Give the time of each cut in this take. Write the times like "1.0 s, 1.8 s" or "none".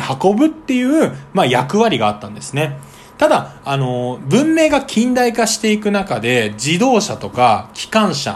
none